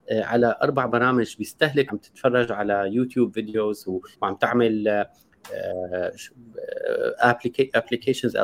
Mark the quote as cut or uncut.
cut